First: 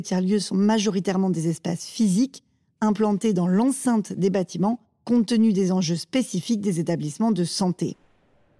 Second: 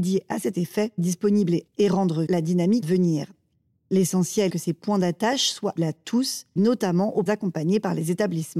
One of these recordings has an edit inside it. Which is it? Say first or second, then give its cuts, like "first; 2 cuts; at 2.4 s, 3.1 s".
second; 8 cuts; at 1.0 s, 1.7 s, 2.3 s, 2.8 s, 4.5 s, 5.8 s, 6.6 s, 7.3 s